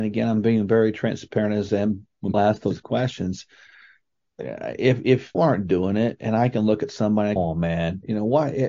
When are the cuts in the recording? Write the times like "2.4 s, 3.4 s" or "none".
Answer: 1.7 s, 2.3 s, 5.3 s, 7.4 s